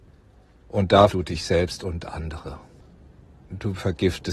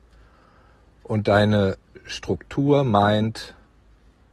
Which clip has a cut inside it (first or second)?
first